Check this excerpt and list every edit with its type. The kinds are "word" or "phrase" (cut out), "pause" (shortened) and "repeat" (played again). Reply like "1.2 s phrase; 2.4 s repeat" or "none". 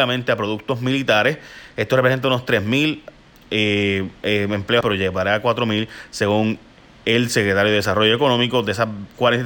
4.8 s word